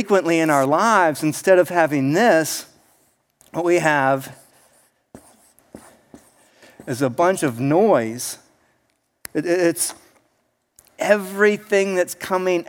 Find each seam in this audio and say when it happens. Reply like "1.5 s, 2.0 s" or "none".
none